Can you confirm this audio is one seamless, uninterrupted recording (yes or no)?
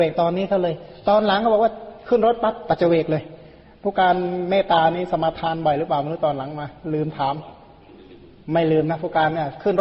yes